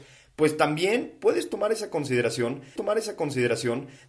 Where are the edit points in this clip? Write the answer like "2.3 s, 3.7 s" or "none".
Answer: 2.8 s